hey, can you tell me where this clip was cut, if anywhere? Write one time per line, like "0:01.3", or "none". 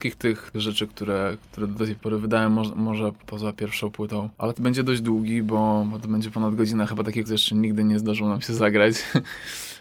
0:04.5
0:07.3